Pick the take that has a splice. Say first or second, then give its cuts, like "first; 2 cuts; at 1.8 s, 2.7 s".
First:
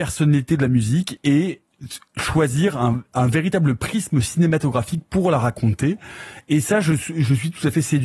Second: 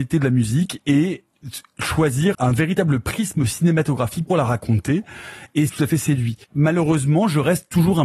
second; 4 cuts; at 2.3 s, 4.3 s, 5.7 s, 6.4 s